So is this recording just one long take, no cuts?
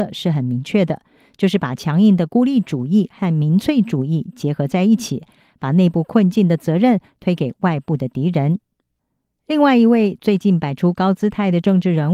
yes; 0 cuts

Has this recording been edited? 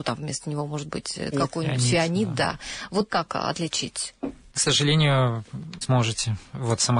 yes; 4 cuts; at 1.3 s, 3.1 s, 4.5 s, 5.8 s

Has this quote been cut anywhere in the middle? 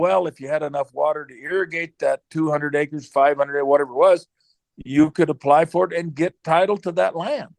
no; 0 cuts

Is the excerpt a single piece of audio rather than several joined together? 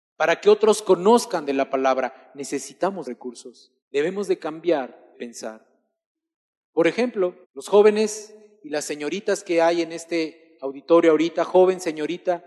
no; 4 cuts; at 3.0 s, 3.8 s, 5.1 s, 7.4 s

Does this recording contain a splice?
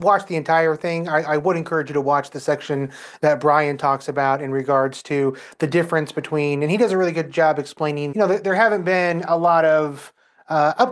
yes; 1 cut; at 8.1 s

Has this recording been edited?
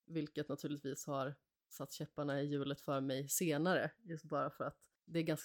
no; 0 cuts

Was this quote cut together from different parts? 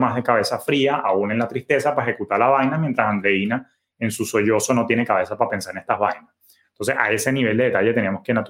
no; 0 cuts

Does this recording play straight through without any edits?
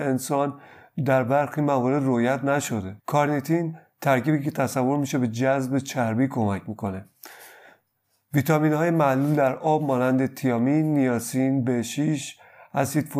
no; 1 cut; at 3.0 s

